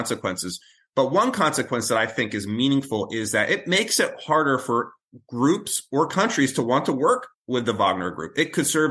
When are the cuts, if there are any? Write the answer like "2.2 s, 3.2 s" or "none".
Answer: 7.3 s